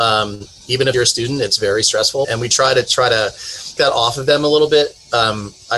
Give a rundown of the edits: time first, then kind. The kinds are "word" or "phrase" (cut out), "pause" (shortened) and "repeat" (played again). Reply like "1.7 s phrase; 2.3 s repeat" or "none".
0.9 s phrase; 2.2 s word; 3.8 s word